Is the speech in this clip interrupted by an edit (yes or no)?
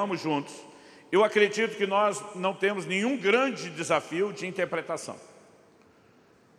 no